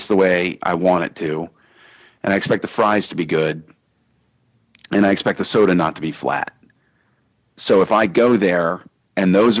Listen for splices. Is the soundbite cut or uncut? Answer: uncut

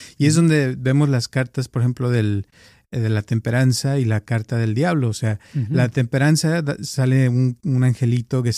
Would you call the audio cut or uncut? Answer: uncut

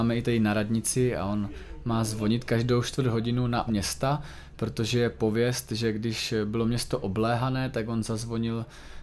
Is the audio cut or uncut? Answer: cut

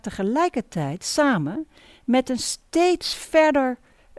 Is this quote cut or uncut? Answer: uncut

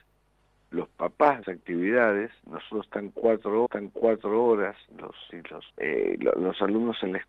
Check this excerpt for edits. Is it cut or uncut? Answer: cut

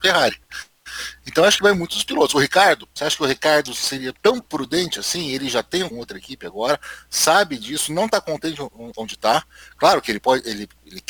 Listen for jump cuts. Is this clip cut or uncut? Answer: cut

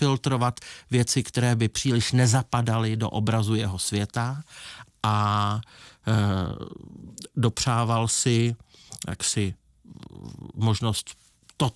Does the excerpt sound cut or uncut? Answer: uncut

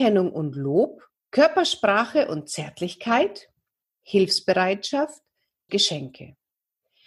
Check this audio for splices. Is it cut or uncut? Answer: cut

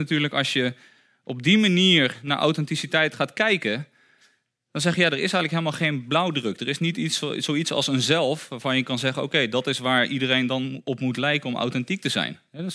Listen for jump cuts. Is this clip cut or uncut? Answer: uncut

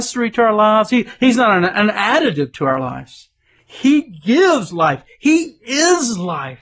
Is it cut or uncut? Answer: uncut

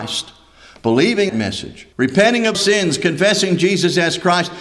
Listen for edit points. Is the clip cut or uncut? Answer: cut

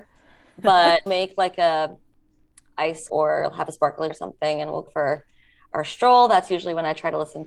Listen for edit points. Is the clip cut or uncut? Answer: cut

